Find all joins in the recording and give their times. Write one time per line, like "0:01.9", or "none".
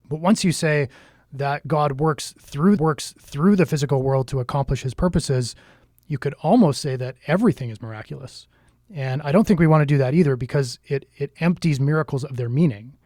0:02.8